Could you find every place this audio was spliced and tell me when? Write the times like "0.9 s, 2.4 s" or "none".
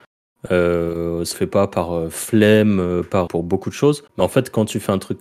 1.3 s, 3.3 s, 4.1 s